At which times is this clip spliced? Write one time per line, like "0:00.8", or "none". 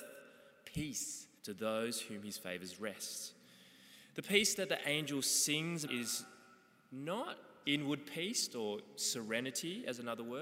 0:01.4
0:05.9
0:07.6